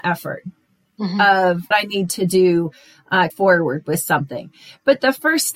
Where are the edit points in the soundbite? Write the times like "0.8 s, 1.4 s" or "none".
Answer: 1.7 s, 3.3 s